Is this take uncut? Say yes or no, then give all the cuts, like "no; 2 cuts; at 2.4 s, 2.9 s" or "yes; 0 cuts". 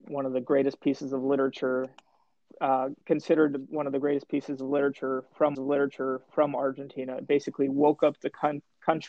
no; 2 cuts; at 3.0 s, 5.5 s